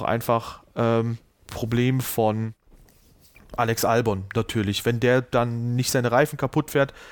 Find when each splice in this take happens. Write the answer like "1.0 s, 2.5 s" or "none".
1.4 s